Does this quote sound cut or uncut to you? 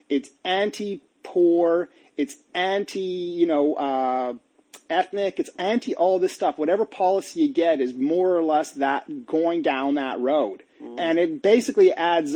uncut